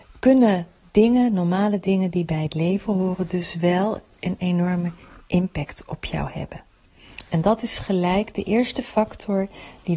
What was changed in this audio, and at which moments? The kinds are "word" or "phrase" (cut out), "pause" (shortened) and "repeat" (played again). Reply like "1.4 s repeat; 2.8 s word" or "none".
none